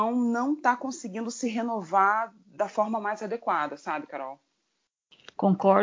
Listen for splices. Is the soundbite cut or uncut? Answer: uncut